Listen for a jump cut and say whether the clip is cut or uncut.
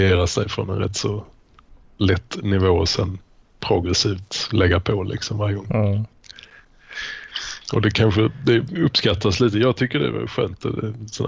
uncut